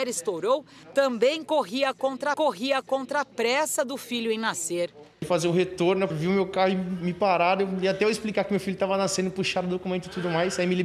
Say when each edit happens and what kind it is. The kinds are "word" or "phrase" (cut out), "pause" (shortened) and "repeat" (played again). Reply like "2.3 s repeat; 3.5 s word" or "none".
2.3 s repeat; 6.1 s word